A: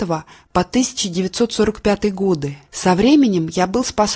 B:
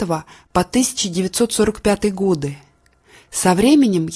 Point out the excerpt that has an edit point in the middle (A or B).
A